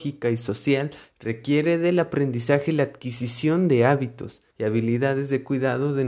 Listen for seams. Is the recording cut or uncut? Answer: cut